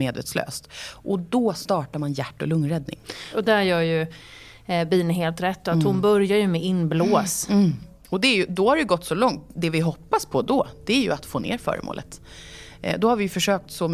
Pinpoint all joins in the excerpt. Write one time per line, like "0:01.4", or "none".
none